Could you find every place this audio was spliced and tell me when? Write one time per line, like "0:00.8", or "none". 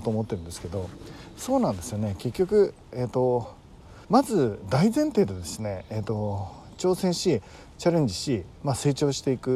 0:04.0

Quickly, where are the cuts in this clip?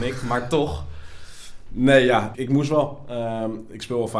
0:02.3

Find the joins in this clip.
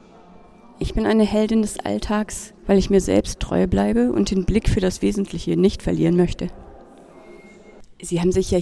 0:02.6

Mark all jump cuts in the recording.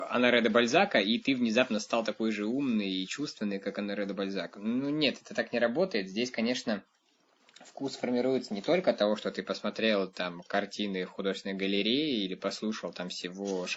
none

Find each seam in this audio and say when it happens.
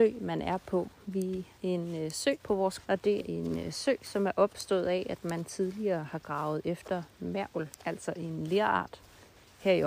0:01.6
0:02.4
0:02.8
0:03.2
0:07.8

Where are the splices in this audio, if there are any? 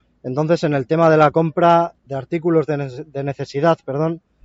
0:02.1

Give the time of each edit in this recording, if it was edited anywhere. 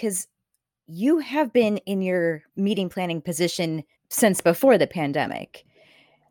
0:02.5
0:04.0

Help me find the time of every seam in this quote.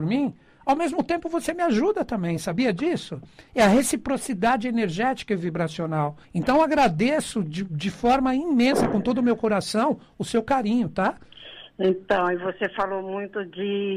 0:06.2

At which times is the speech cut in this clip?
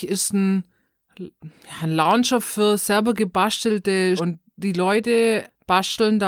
0:04.2

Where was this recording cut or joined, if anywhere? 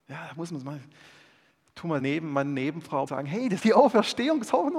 0:02.0
0:03.1
0:03.6

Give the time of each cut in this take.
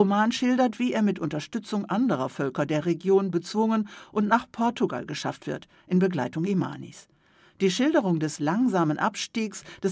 none

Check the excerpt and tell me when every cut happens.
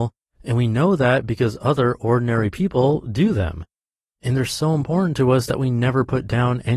none

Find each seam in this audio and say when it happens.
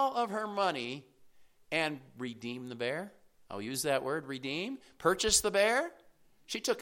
none

